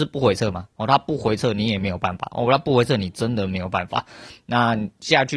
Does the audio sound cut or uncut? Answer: uncut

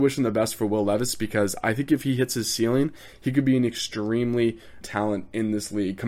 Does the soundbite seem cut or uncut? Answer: cut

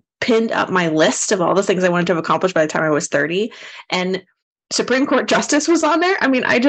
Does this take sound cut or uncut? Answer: uncut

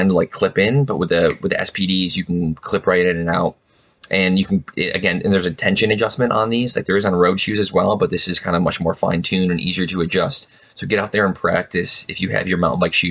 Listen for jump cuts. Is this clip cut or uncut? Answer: uncut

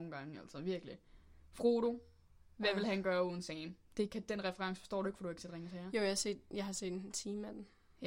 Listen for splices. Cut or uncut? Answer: uncut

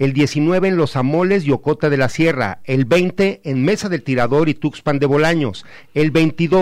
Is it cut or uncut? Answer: uncut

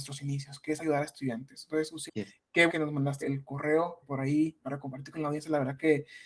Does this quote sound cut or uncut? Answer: cut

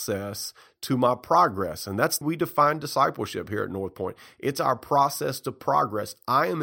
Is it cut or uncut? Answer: cut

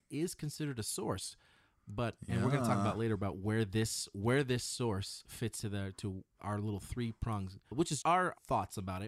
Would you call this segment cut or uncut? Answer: cut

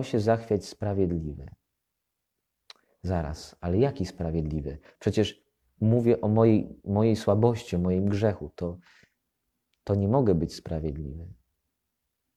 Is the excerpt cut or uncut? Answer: uncut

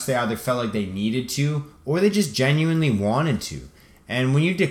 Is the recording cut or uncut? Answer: uncut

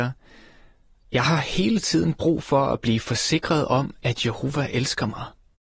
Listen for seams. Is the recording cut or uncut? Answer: uncut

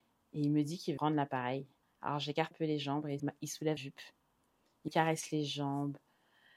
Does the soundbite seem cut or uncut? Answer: cut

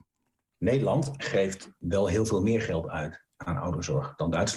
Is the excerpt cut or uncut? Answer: uncut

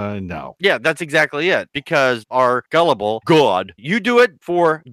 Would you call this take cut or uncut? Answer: cut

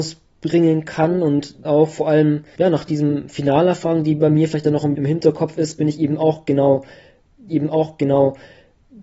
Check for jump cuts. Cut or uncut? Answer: cut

